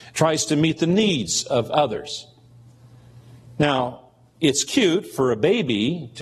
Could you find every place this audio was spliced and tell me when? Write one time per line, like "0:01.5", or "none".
none